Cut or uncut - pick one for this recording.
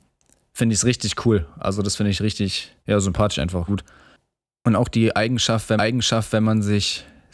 cut